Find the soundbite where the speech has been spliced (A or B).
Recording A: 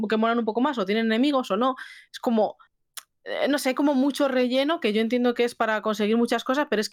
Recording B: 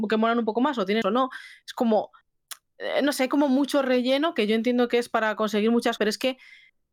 B